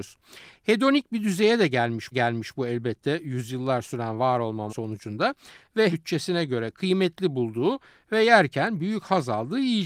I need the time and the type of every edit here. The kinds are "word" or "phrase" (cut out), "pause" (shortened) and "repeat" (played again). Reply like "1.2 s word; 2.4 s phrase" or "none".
2.1 s repeat; 4.7 s word; 5.9 s word